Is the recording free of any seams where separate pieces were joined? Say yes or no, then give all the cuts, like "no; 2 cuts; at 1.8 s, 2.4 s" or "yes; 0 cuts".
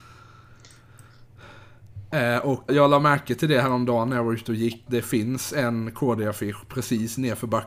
no; 2 cuts; at 2.7 s, 4.9 s